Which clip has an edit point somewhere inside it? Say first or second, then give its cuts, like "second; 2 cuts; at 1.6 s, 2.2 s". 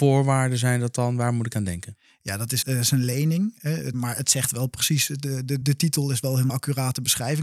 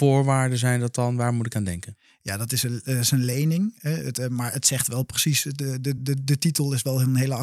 first; 4 cuts; at 2.6 s, 3.9 s, 5.6 s, 6.5 s